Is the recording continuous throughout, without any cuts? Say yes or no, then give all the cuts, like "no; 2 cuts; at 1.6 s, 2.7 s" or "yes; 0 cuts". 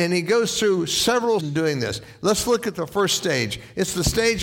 no; 1 cut; at 1.4 s